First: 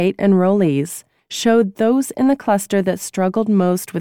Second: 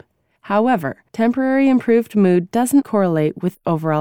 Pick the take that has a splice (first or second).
second